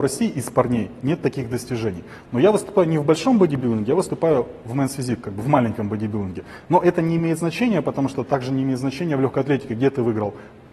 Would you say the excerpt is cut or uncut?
uncut